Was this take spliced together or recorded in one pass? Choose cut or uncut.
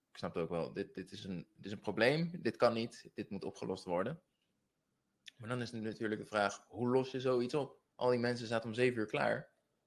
cut